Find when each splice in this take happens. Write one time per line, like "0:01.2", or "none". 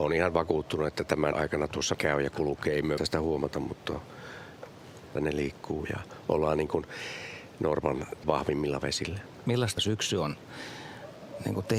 0:01.3
0:01.9
0:03.0
0:05.2
0:08.2
0:09.8